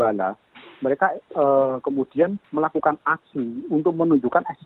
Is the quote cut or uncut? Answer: uncut